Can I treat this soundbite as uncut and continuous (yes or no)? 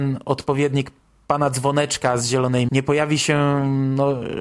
no